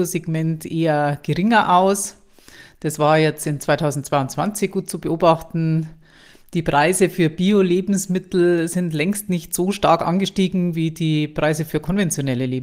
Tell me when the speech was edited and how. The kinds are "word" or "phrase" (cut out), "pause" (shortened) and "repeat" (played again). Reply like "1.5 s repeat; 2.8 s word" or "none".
none